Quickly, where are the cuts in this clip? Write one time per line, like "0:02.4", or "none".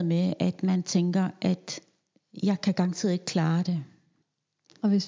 none